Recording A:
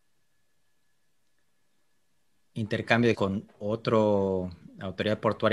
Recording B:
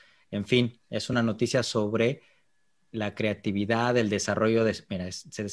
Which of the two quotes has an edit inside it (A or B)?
A